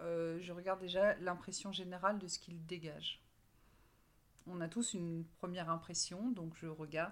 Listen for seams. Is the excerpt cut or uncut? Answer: cut